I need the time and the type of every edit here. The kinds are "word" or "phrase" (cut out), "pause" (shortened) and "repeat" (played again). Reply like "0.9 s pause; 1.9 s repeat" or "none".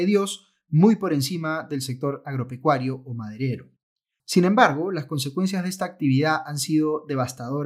none